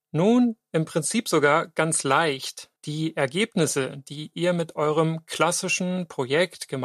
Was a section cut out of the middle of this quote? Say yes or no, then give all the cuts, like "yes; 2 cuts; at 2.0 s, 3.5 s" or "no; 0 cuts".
yes; 1 cut; at 2.8 s